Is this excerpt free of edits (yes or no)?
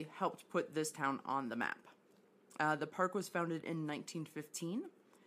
yes